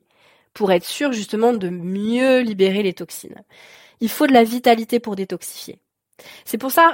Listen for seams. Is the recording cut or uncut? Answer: uncut